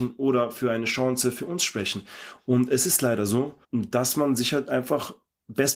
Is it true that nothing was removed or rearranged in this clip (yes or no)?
no